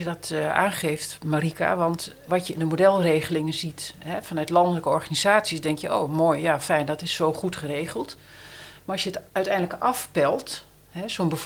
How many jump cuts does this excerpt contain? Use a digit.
2